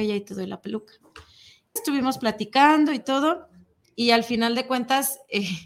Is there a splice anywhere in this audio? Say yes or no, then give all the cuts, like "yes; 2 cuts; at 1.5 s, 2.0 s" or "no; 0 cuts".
yes; 1 cut; at 1.8 s